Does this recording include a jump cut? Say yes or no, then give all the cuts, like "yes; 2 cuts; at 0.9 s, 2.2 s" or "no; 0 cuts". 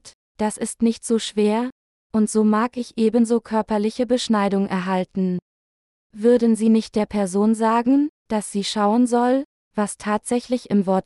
no; 0 cuts